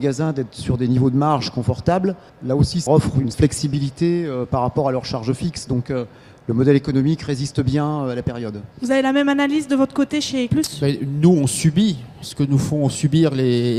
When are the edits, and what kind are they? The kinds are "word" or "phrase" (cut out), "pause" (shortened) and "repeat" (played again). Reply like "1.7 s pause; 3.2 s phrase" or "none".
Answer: 2.3 s pause; 2.9 s word; 3.3 s word; 8.7 s pause; 10.5 s word